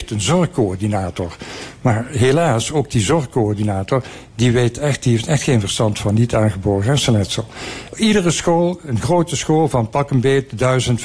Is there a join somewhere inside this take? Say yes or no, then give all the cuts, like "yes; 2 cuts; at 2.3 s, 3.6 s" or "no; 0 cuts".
no; 0 cuts